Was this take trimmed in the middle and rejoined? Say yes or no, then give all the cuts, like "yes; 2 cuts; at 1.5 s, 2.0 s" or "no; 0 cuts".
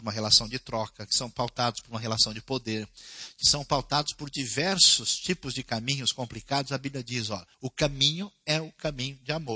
yes; 1 cut; at 7.5 s